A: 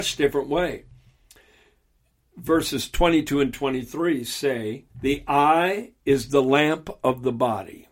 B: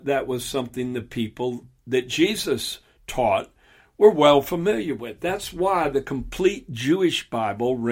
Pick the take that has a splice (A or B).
A